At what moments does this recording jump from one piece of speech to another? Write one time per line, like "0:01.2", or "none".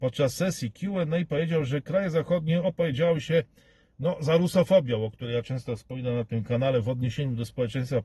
none